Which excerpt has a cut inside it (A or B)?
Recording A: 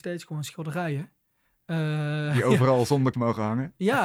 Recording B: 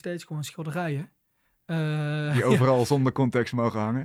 A